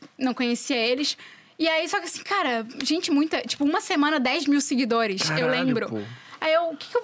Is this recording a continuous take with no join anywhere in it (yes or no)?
yes